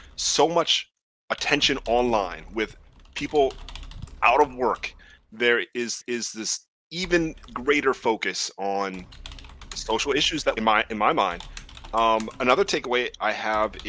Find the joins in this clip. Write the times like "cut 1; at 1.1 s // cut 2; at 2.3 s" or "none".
cut 1; at 6.0 s // cut 2; at 10.6 s